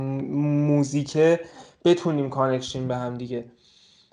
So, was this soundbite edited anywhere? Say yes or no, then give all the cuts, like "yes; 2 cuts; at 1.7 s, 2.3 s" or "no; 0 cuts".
no; 0 cuts